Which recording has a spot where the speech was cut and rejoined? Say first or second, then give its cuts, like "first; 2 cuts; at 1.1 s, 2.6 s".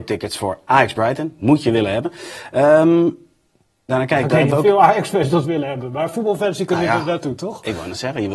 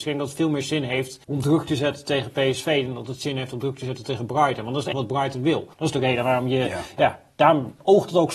second; 3 cuts; at 1.2 s, 4.9 s, 5.7 s